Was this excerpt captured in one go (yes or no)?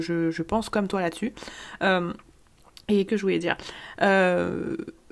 no